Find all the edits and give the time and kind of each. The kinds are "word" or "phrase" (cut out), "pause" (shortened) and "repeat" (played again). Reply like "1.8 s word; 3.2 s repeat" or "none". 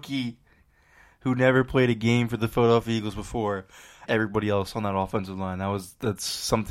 4.1 s word

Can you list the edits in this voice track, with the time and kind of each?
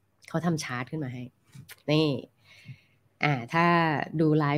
none

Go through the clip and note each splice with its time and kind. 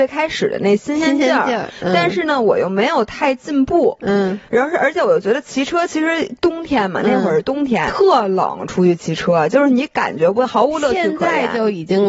4.5 s pause; 7.9 s word

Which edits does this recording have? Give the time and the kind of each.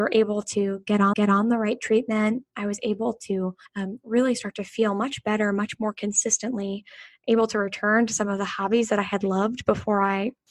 1.1 s repeat; 3.7 s pause

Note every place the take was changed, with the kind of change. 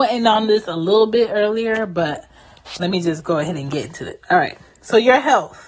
none

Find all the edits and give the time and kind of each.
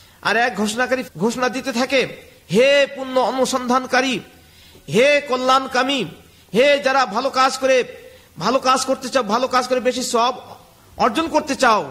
1.1 s word

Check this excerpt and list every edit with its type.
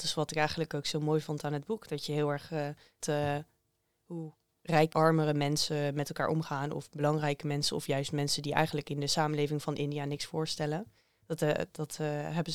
3.0 s word; 4.9 s word

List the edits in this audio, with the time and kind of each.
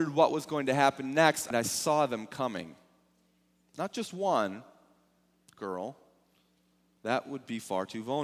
1.5 s phrase

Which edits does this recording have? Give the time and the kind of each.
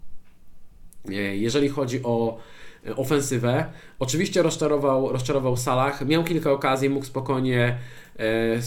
none

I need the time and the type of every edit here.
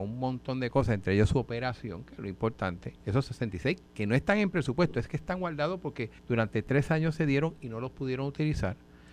3.0 s pause; 3.9 s pause; 6.2 s pause

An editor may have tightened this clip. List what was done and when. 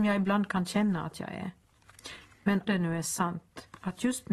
2.7 s word

